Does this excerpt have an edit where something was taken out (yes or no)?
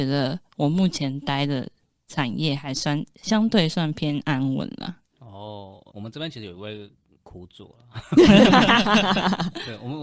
yes